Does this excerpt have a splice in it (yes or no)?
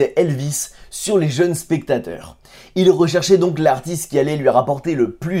no